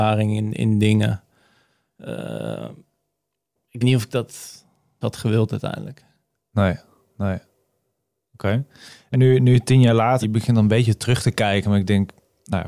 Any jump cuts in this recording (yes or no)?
yes